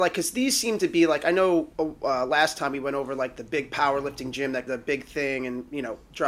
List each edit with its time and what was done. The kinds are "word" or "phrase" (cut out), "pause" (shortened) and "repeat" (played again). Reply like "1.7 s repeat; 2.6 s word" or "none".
1.7 s pause; 3.4 s phrase; 4.7 s word